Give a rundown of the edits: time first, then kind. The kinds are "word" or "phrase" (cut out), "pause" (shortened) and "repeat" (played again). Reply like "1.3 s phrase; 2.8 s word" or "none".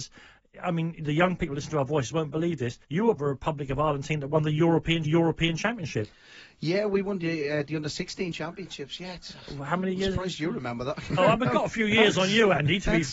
2.8 s pause; 3.2 s word; 5.0 s repeat; 8.3 s word; 11.2 s word